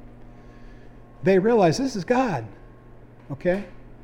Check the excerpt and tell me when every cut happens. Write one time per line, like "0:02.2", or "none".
none

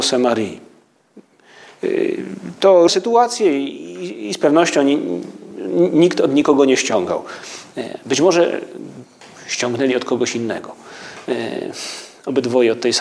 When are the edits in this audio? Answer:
0:02.9

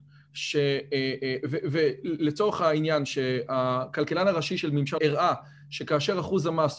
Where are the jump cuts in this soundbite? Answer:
0:05.0

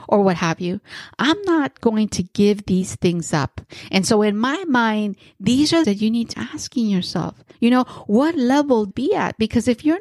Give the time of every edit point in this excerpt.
0:05.8
0:06.3
0:07.5
0:08.9

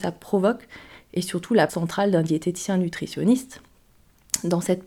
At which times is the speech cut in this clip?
0:01.7

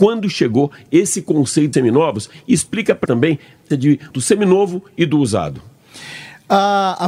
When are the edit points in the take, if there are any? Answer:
0:01.7
0:03.1
0:03.7
0:04.1

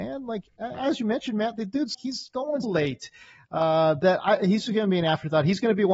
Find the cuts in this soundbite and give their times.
0:01.9
0:02.6
0:04.6

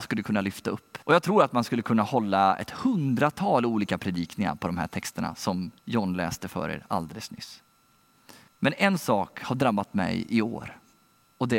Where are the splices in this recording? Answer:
0:01.0
0:05.8
0:08.5

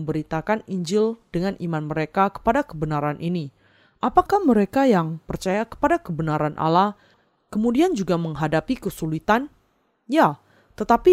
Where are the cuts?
none

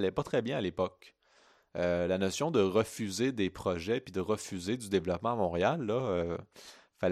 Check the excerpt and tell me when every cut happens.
none

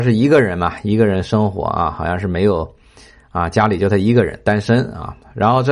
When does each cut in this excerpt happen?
none

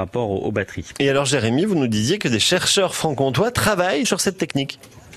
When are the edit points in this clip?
0:04.0

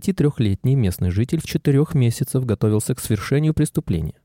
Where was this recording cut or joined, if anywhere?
0:01.5

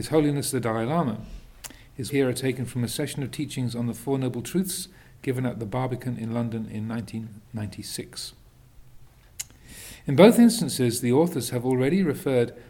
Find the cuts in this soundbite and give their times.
0:02.1

